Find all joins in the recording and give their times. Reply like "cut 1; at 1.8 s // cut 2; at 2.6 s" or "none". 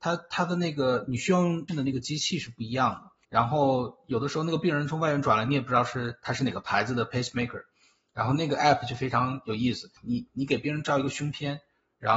cut 1; at 1.7 s // cut 2; at 3.2 s // cut 3; at 10.0 s

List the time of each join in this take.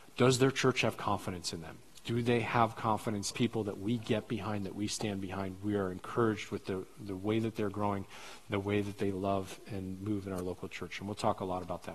cut 1; at 3.3 s

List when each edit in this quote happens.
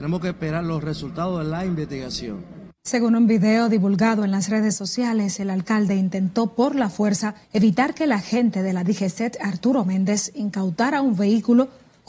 cut 1; at 2.8 s // cut 2; at 7.4 s

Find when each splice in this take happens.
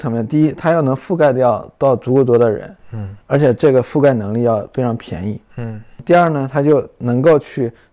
cut 1; at 3.2 s

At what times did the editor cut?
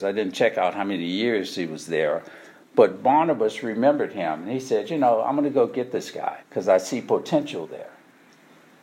cut 1; at 6.4 s

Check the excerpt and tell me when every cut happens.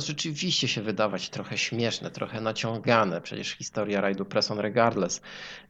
none

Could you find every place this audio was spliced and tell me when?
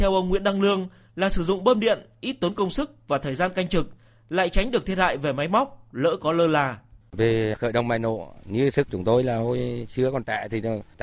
none

